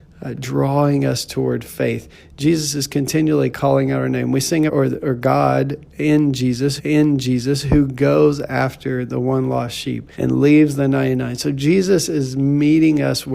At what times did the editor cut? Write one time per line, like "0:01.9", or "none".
0:04.7
0:06.8
0:10.1